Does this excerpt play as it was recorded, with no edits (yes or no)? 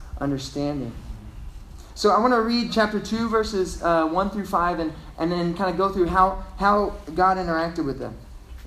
yes